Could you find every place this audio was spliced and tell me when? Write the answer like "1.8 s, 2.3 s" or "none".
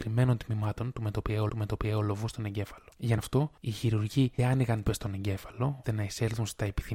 1.5 s, 3.2 s, 3.6 s, 4.4 s, 4.9 s, 5.8 s